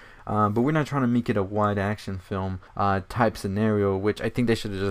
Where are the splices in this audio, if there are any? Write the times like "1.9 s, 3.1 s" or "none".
2.7 s